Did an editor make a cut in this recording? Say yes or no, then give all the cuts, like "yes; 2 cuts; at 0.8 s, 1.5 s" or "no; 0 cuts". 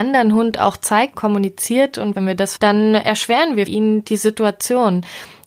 yes; 4 cuts; at 1.1 s, 2.1 s, 2.6 s, 3.7 s